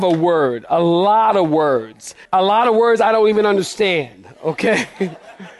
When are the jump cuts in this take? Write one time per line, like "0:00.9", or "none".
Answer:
0:02.2